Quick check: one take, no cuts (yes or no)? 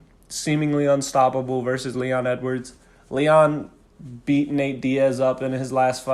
yes